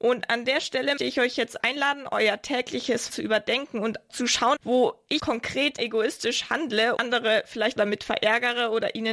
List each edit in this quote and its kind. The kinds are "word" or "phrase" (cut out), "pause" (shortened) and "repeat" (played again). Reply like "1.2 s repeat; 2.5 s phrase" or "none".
1.0 s word; 1.6 s word; 3.1 s word; 4.1 s word; 4.6 s word; 5.2 s word; 5.8 s word; 7.0 s word; 7.8 s word

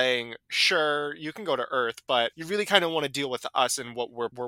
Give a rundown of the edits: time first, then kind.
none

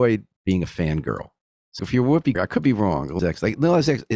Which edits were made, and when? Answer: 1.8 s word; 2.3 s word; 3.2 s word

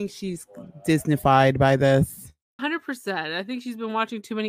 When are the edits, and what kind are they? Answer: 2.6 s word

